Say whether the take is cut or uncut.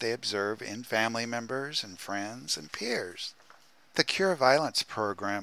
uncut